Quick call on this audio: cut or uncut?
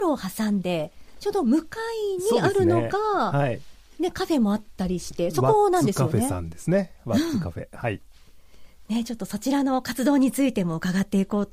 uncut